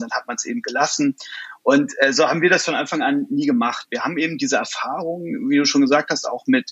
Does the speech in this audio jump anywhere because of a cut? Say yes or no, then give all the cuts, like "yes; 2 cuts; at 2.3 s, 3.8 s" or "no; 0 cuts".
no; 0 cuts